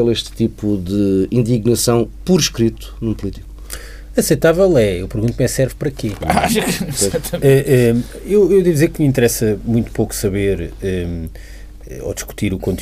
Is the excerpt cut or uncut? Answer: uncut